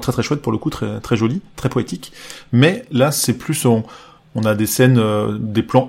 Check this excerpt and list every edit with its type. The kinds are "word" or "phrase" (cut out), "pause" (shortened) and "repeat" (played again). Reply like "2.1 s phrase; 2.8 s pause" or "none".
none

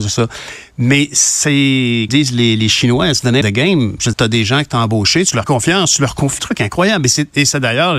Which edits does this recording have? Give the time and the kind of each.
2.1 s word; 3.4 s word; 4.1 s word; 5.4 s word; 6.4 s word

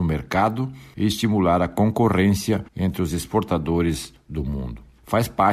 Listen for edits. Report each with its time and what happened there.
2.7 s pause

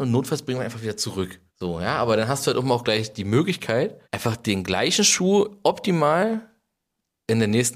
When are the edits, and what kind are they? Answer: 1.5 s pause; 4.0 s pause

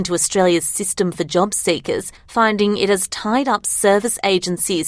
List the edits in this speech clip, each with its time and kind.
2.2 s pause

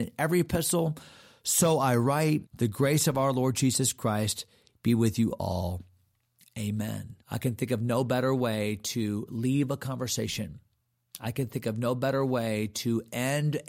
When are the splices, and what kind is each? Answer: 2.5 s pause; 7.2 s pause

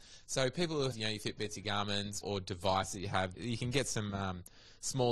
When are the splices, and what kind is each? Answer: 0.9 s word; 2.2 s phrase; 3.3 s word

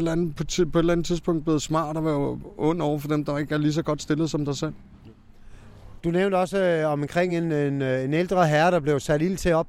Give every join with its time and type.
none

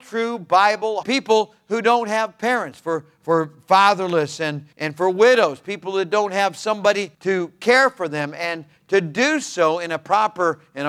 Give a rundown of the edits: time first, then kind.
1.0 s phrase; 4.7 s pause; 7.1 s pause

